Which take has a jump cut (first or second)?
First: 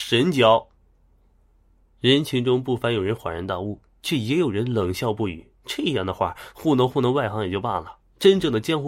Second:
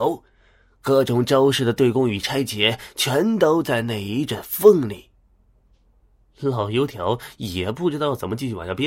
first